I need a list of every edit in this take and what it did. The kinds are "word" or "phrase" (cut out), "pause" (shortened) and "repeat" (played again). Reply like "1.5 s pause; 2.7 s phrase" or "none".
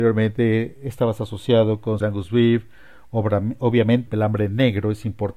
2.0 s word; 4.1 s phrase